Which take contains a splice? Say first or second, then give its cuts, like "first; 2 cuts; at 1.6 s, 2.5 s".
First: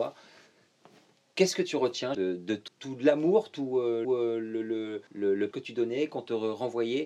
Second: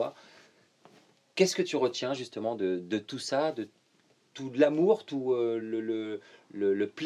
first; 5 cuts; at 2.1 s, 2.7 s, 4.0 s, 5.1 s, 5.5 s